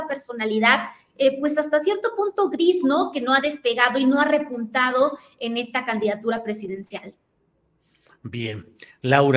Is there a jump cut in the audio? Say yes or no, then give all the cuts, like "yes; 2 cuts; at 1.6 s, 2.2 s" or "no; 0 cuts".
no; 0 cuts